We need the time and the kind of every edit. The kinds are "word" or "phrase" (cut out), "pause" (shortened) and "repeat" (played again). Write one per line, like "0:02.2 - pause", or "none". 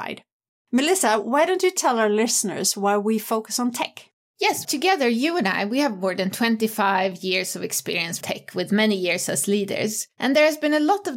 0:04.6 - word
0:08.2 - word